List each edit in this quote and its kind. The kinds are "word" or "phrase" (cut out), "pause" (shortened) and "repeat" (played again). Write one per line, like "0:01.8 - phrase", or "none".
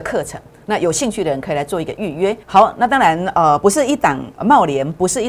0:02.4 - pause
0:04.3 - pause